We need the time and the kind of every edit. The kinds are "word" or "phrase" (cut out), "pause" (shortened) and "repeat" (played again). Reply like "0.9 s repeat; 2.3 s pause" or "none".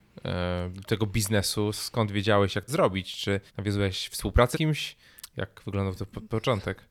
2.7 s phrase; 3.5 s pause; 4.5 s word